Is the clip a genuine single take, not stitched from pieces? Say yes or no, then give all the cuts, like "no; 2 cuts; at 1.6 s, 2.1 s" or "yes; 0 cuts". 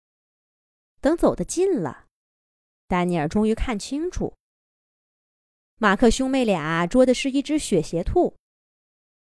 yes; 0 cuts